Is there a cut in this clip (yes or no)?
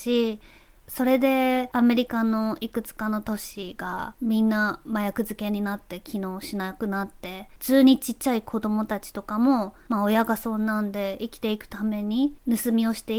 yes